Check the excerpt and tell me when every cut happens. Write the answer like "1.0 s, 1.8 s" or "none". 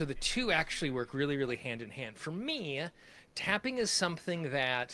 none

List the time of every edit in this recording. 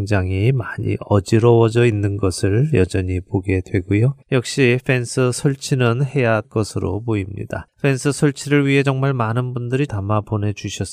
4.2 s, 6.4 s, 7.7 s, 9.9 s

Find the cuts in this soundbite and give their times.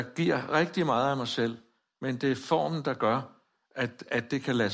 none

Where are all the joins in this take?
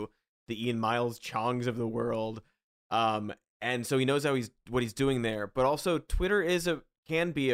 none

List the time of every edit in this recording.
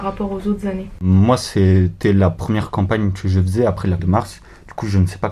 4.0 s

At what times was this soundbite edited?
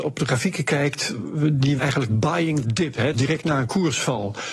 1.8 s, 2.6 s, 3.1 s

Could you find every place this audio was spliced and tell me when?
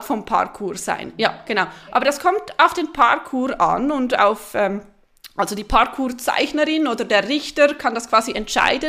none

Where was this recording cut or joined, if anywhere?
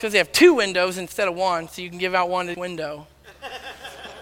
2.5 s

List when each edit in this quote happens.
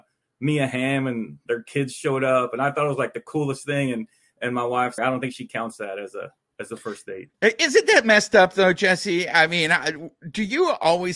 5.0 s, 6.4 s, 7.3 s

